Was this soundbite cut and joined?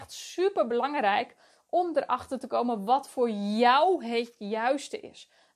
no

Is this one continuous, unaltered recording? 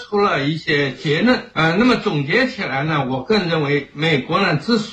no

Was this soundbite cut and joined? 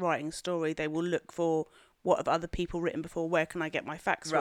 no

